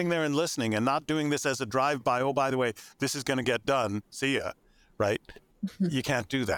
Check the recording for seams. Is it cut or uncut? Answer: uncut